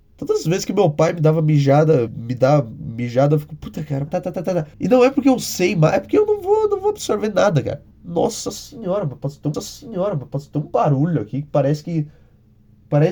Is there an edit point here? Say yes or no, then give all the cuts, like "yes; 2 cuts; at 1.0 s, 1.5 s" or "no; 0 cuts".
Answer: yes; 5 cuts; at 2.1 s, 4.1 s, 4.7 s, 7.9 s, 9.5 s